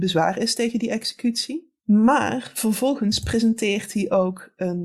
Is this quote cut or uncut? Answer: cut